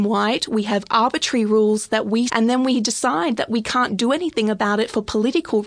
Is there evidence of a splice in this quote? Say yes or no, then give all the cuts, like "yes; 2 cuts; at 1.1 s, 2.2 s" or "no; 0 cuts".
yes; 1 cut; at 2.3 s